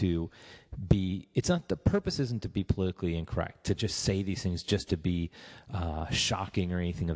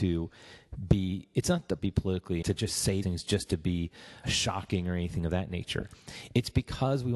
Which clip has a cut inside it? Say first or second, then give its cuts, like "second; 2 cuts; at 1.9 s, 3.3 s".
second; 4 cuts; at 1.8 s, 2.4 s, 3.0 s, 4.2 s